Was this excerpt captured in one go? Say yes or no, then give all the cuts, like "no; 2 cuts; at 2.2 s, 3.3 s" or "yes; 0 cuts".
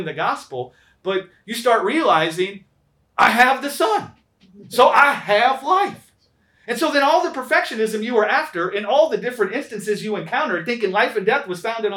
yes; 0 cuts